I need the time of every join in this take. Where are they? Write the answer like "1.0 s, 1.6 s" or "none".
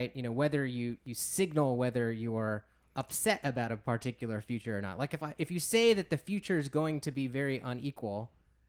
none